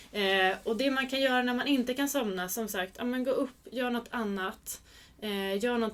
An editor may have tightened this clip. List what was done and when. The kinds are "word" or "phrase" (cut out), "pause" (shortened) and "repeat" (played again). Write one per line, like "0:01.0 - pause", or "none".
none